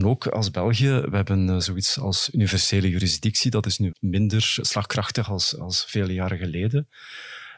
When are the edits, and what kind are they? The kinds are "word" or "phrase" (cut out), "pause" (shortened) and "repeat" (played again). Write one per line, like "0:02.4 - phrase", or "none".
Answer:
0:03.9 - word